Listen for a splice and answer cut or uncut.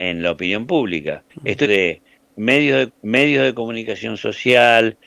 cut